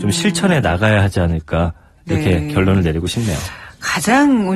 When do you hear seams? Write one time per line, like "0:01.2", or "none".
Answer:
none